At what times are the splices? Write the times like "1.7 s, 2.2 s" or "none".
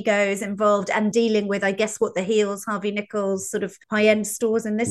1.1 s, 3.8 s